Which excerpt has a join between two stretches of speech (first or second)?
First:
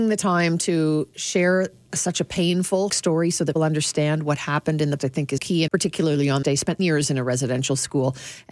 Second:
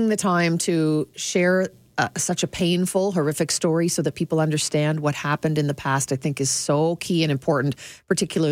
first